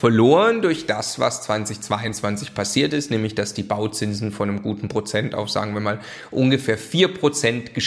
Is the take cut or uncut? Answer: uncut